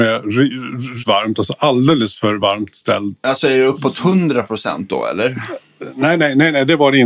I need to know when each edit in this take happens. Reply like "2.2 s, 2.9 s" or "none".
1.0 s